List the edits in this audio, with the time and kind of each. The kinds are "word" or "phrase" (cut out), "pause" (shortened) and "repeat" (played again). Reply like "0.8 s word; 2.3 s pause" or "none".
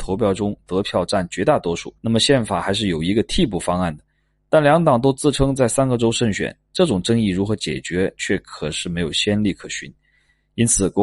2.0 s pause